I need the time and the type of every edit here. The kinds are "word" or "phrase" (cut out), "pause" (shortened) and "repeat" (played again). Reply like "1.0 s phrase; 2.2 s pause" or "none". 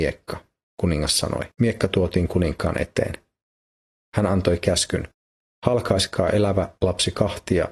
1.5 s pause